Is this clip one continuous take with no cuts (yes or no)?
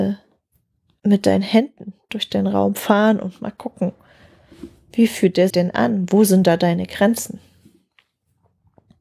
no